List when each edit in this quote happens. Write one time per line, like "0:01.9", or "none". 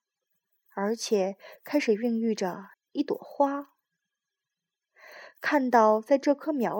0:02.7